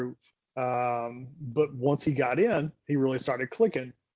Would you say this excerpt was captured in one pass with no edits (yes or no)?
yes